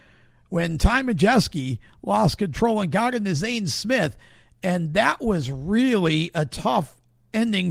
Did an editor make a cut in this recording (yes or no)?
no